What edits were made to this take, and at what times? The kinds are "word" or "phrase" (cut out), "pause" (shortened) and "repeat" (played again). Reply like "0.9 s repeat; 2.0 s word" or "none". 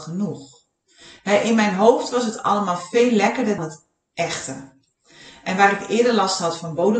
3.6 s word